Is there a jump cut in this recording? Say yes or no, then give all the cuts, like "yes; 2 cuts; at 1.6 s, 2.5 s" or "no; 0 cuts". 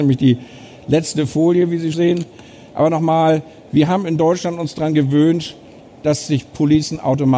yes; 1 cut; at 1.9 s